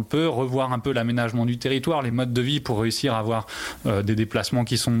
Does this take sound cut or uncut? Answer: uncut